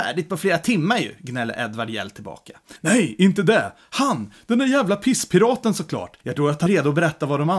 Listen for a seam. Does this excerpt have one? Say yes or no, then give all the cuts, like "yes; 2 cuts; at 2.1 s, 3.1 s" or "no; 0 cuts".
yes; 3 cuts; at 2.8 s, 6.2 s, 6.7 s